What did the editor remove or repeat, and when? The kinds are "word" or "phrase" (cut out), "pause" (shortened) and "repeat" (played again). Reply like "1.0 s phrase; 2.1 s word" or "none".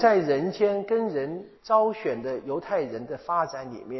1.6 s pause